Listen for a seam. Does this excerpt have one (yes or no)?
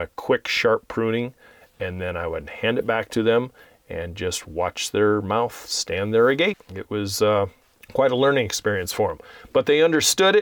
no